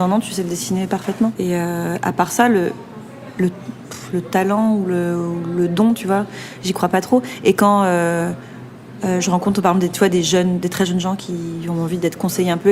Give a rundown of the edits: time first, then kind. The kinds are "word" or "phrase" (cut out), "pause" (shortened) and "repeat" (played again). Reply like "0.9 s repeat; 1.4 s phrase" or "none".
none